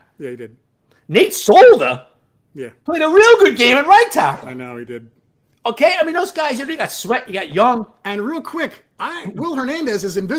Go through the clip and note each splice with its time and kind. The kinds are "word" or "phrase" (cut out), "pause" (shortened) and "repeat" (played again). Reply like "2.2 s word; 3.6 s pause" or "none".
none